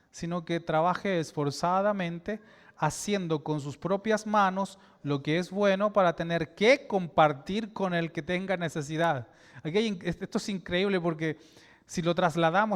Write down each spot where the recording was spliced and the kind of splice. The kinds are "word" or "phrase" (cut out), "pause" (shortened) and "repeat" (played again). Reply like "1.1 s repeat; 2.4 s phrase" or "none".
none